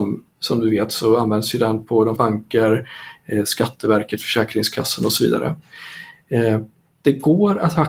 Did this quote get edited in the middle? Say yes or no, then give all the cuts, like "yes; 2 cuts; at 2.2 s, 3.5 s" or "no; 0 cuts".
yes; 1 cut; at 2.2 s